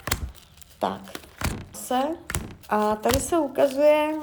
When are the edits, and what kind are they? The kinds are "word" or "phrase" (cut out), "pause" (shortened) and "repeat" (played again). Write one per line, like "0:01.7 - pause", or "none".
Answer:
0:01.7 - word
0:02.6 - pause

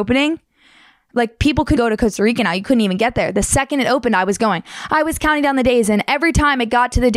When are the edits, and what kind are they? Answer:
0:01.8 - word

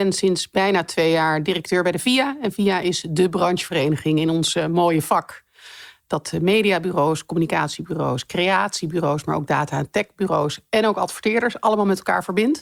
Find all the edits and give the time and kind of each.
none

